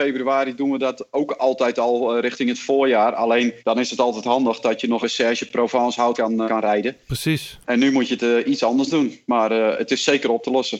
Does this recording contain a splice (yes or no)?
yes